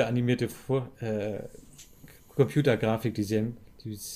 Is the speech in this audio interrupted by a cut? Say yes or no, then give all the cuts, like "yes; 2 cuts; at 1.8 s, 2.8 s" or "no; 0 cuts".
no; 0 cuts